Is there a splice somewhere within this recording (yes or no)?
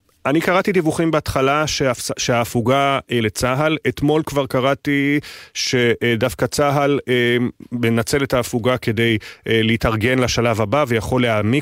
yes